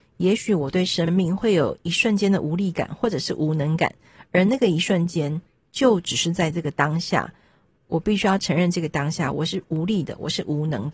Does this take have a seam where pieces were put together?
no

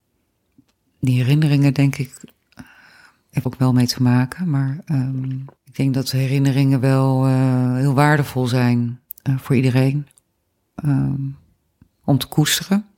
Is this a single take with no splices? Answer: no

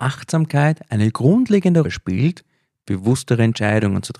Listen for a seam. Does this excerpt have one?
yes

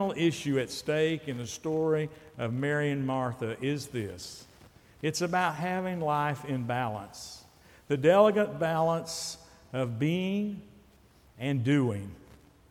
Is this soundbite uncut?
yes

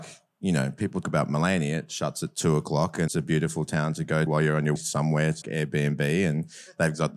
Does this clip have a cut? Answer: yes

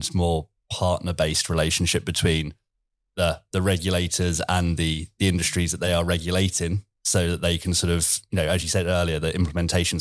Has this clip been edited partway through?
no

